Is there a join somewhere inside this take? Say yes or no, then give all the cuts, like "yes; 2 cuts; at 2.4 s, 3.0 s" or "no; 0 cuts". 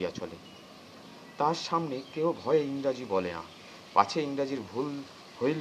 no; 0 cuts